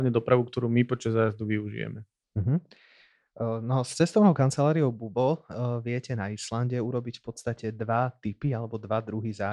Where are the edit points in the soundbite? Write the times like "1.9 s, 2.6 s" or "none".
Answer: none